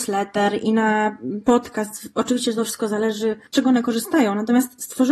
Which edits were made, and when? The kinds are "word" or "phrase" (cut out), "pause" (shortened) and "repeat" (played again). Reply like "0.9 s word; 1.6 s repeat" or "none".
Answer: 3.5 s pause